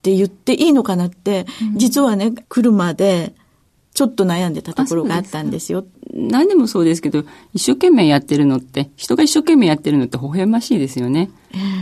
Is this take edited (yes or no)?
no